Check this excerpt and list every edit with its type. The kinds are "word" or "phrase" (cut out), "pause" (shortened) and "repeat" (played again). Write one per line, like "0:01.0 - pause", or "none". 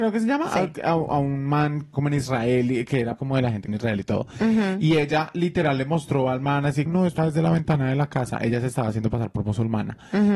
0:01.9 - phrase
0:03.2 - word
0:03.7 - phrase
0:06.9 - word
0:07.2 - word